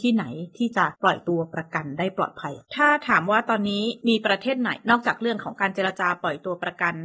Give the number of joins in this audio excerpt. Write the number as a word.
one